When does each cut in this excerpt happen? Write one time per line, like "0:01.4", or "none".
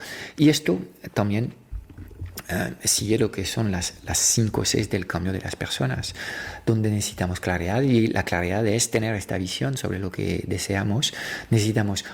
none